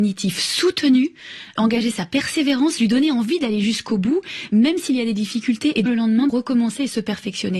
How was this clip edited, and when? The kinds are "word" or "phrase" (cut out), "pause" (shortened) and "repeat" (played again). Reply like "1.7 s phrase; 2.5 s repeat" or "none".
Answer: 1.6 s word; 5.9 s word; 6.3 s word